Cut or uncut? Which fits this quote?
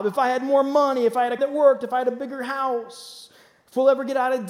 cut